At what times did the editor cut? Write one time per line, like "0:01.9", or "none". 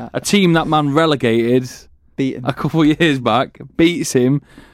none